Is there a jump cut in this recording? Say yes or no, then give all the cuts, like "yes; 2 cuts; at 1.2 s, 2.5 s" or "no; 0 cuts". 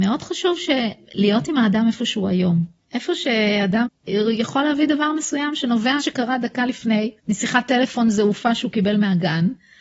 yes; 4 cuts; at 2.8 s, 3.9 s, 6.0 s, 7.2 s